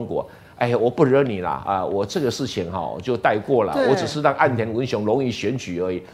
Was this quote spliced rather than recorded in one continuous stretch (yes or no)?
no